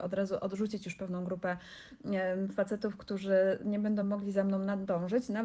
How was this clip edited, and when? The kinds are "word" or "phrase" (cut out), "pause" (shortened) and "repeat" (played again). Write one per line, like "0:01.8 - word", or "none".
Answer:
none